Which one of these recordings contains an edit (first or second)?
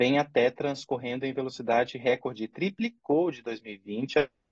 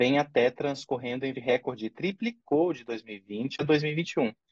second